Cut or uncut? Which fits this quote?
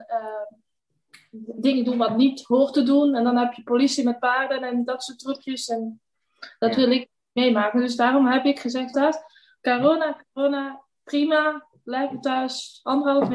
cut